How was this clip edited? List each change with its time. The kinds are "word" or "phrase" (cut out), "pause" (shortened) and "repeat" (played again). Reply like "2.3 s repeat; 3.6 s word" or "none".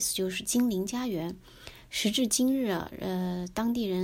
none